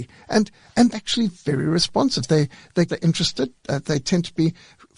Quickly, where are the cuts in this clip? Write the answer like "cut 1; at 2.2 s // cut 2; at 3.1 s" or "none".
cut 1; at 0.9 s // cut 2; at 1.3 s // cut 3; at 2.9 s